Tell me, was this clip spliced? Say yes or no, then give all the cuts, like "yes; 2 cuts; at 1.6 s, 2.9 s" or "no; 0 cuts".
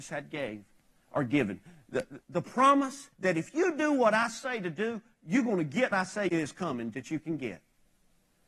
yes; 4 cuts; at 2.2 s, 3.1 s, 5.9 s, 6.3 s